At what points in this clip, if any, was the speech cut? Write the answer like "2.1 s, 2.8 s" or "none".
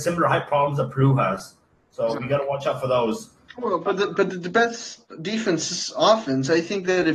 none